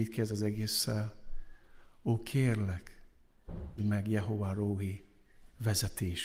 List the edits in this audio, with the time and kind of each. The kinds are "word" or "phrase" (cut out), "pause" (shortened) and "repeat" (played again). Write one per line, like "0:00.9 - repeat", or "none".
0:03.8 - word